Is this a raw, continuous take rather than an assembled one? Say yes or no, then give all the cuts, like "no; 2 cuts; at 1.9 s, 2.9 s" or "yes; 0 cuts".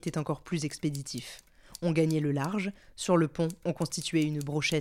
yes; 0 cuts